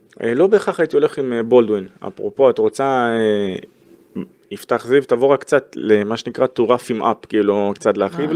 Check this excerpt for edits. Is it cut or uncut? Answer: uncut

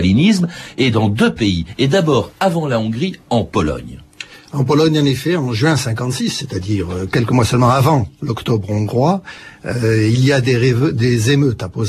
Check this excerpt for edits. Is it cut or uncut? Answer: uncut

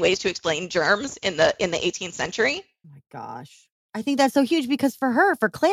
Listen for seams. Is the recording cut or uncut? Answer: cut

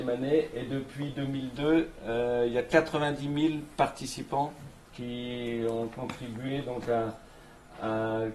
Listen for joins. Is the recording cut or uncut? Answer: uncut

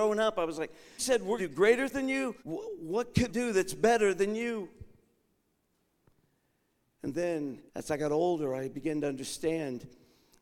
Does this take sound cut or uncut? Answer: cut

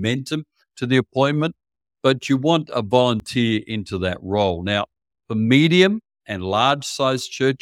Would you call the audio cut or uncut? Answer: uncut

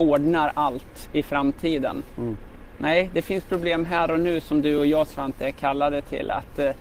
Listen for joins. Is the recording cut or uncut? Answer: uncut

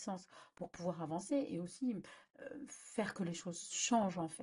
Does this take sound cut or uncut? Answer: uncut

